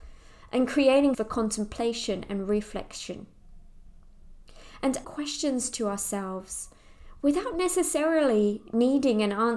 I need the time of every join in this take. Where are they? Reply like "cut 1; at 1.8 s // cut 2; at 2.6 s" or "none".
cut 1; at 1.1 s // cut 2; at 5.0 s